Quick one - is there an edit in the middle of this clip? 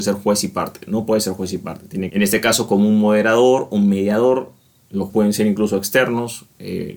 yes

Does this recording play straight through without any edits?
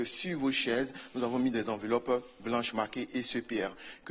yes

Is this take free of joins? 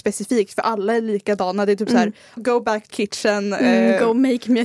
no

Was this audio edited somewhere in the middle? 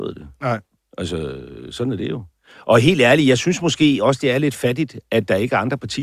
no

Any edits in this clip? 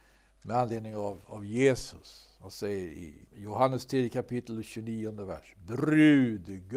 yes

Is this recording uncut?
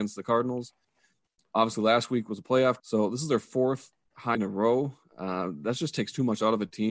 no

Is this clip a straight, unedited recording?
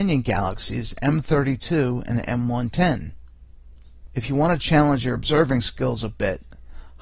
yes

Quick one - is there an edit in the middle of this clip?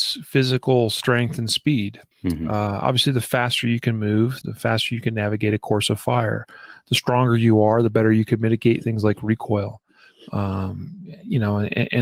yes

